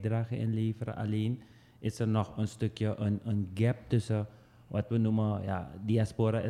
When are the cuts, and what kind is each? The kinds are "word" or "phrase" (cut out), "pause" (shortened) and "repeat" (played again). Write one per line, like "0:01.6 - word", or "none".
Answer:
none